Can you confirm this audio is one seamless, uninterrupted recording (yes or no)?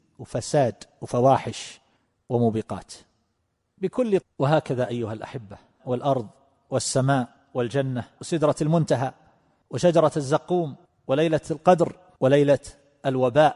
no